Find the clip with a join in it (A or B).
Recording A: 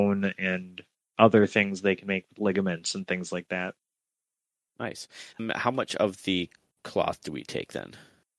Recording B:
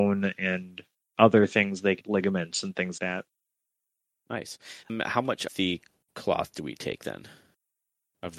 B